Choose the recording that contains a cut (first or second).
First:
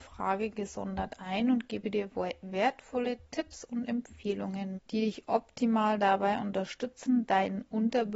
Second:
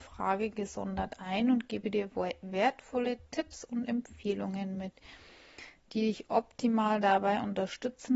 first